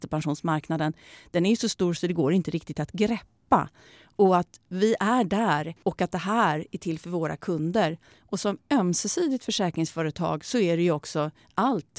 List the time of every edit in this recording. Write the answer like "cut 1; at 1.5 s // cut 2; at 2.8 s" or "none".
none